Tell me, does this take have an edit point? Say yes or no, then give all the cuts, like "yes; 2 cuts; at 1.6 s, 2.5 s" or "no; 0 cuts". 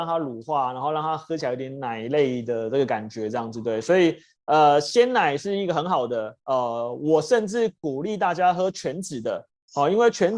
no; 0 cuts